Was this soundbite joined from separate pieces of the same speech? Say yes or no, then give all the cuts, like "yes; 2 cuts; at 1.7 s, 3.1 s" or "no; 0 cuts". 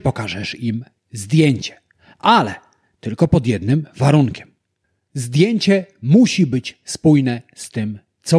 no; 0 cuts